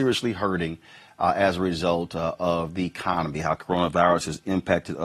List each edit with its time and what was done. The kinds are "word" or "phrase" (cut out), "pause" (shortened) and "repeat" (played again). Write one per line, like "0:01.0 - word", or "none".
none